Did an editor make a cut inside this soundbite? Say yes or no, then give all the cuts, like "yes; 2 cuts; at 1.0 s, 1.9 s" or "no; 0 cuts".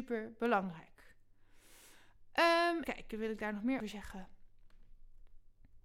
yes; 2 cuts; at 2.8 s, 3.8 s